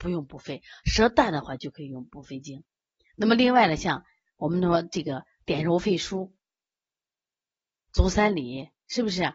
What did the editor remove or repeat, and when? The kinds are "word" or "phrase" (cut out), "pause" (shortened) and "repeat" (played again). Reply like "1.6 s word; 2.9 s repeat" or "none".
none

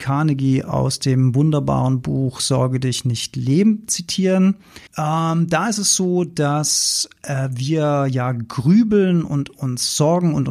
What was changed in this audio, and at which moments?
4.9 s pause

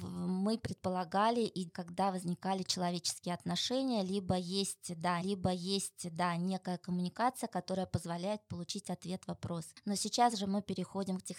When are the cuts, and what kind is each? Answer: 1.7 s word; 5.2 s repeat

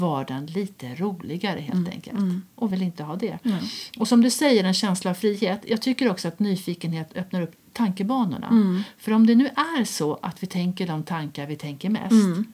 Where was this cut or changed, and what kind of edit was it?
2.7 s word

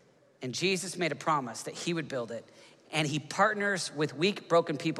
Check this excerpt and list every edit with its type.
none

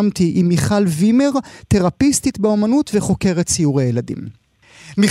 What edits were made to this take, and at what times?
none

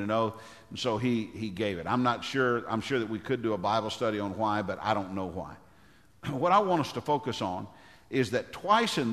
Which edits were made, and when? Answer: none

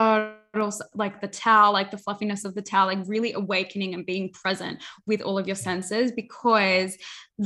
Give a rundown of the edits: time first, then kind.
none

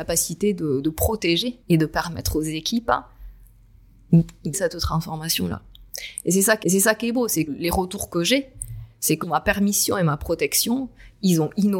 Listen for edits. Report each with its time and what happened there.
1.6 s pause; 4.5 s word; 6.6 s repeat; 7.5 s phrase; 9.2 s word

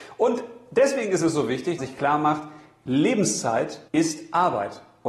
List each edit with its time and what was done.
1.8 s phrase; 3.9 s pause

